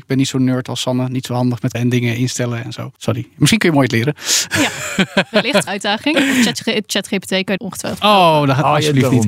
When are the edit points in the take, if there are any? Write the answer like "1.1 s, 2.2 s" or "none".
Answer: 1.7 s, 3.0 s, 5.7 s, 7.6 s